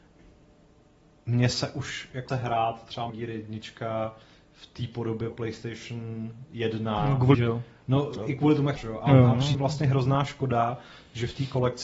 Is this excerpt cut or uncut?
cut